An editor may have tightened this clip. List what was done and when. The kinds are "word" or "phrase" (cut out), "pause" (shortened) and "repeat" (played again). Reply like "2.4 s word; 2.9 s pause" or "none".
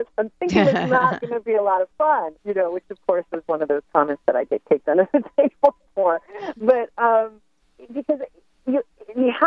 2.4 s pause; 7.6 s pause